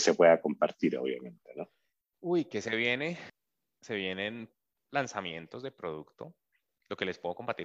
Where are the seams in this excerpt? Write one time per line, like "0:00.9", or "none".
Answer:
none